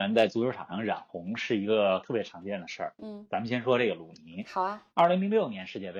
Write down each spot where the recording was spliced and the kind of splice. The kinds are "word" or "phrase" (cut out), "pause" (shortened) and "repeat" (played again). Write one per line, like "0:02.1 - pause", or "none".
0:04.9 - pause